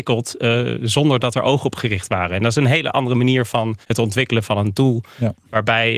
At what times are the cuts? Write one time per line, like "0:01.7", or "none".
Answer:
0:03.8